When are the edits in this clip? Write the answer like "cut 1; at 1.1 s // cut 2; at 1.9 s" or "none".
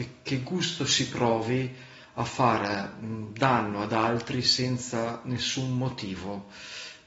none